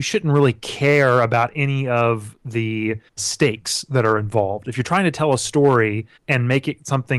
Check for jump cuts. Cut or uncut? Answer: cut